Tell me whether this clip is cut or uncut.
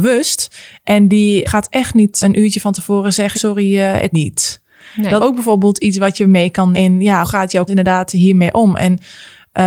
cut